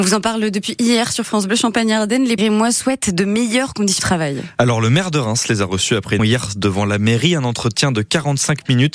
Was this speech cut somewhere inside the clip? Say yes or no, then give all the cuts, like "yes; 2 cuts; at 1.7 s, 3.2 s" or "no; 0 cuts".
yes; 3 cuts; at 2.4 s, 4.0 s, 6.2 s